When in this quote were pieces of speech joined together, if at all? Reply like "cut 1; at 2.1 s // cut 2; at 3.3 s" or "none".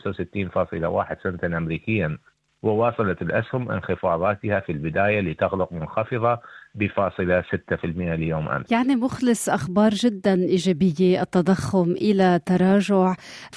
none